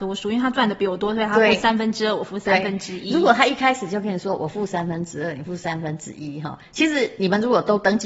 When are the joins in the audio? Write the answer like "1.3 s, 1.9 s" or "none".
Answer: none

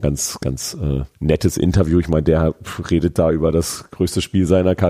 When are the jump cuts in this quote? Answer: 1.1 s

